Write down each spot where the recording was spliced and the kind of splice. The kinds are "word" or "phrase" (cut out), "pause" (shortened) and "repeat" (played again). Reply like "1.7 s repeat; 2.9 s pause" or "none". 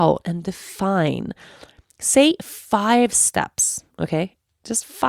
none